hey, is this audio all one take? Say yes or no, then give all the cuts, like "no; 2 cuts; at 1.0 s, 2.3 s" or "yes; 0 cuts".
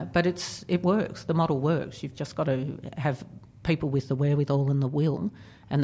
yes; 0 cuts